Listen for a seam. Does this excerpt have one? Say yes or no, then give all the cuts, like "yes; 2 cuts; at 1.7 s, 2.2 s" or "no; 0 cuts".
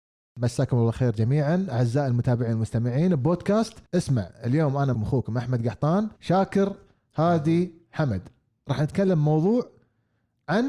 yes; 3 cuts; at 3.9 s, 4.9 s, 6.2 s